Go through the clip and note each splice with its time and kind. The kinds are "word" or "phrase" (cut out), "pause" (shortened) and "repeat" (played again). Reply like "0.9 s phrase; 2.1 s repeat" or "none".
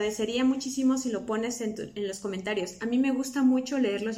none